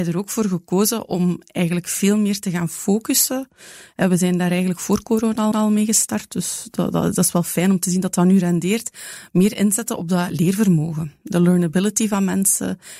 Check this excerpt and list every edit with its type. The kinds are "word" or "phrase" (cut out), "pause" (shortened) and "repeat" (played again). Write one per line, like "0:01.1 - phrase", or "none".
0:05.5 - repeat